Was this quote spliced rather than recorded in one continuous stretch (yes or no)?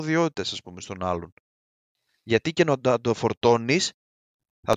no